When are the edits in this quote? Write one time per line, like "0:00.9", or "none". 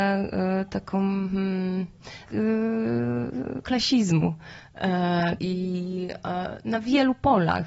0:02.3
0:03.6
0:05.4